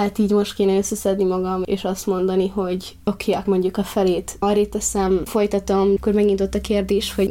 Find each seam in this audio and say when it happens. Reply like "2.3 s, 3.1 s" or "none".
3.5 s, 5.3 s, 6.0 s